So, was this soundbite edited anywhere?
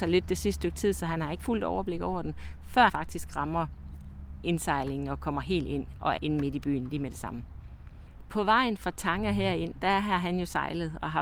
yes; 3 cuts; at 1.4 s, 2.9 s, 6.2 s

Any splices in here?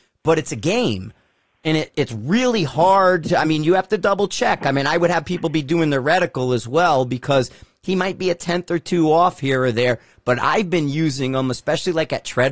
no; 0 cuts

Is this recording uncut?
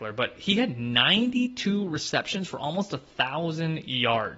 yes; 0 cuts

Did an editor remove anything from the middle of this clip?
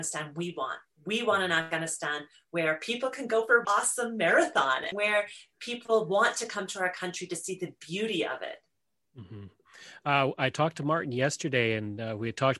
yes; 2 cuts; at 3.6 s, 4.9 s

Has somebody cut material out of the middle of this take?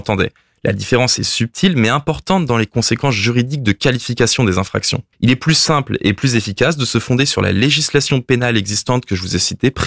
yes; 1 cut; at 5.1 s

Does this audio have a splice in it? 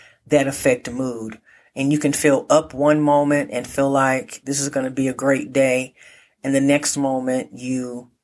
no; 0 cuts

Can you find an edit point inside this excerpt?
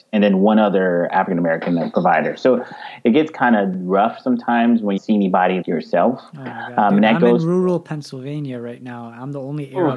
yes; 2 cuts; at 5.0 s, 5.6 s

